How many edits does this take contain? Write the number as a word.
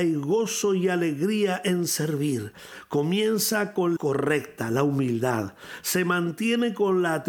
one